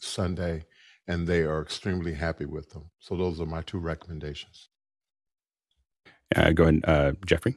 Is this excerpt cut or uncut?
uncut